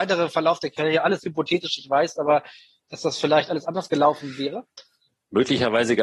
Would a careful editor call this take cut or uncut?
uncut